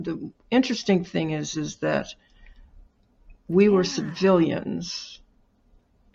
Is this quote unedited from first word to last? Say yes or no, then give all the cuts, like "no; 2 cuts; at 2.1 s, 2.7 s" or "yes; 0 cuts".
yes; 0 cuts